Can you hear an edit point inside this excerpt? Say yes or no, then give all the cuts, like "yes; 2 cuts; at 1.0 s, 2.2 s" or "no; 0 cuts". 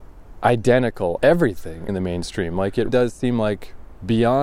yes; 3 cuts; at 1.2 s, 1.9 s, 2.9 s